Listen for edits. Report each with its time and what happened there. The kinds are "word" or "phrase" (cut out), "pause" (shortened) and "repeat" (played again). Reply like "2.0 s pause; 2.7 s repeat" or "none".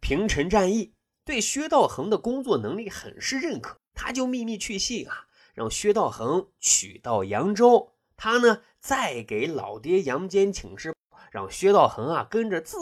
3.8 s word